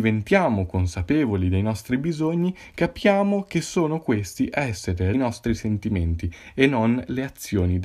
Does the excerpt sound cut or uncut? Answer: cut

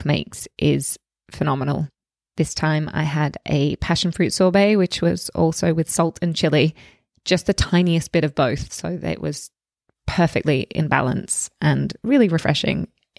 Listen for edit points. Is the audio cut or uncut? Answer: uncut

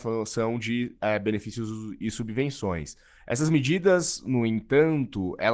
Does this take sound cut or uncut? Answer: uncut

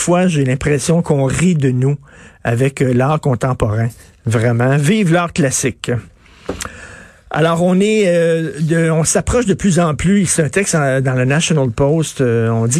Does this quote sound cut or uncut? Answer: uncut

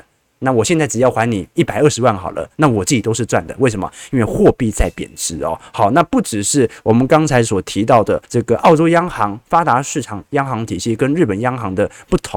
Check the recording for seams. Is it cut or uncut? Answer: cut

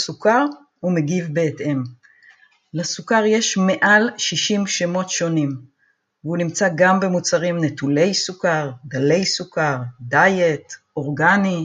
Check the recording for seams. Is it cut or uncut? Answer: uncut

